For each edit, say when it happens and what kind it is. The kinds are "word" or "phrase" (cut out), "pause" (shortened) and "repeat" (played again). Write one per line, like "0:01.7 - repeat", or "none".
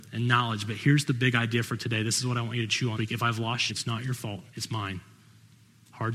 0:03.0 - word
0:03.7 - word
0:04.5 - pause